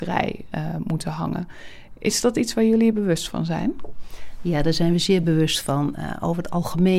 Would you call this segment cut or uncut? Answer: uncut